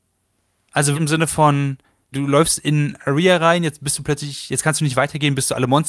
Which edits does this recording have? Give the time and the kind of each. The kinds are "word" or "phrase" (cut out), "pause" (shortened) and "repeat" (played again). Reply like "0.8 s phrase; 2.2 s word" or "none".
0.9 s word; 2.1 s word